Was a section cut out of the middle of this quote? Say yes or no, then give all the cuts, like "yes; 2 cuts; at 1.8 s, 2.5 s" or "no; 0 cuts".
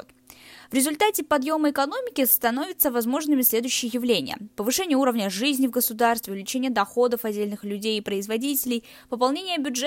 no; 0 cuts